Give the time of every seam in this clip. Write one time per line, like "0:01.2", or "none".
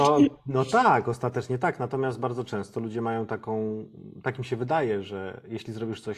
none